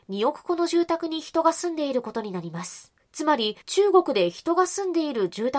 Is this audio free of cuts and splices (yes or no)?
no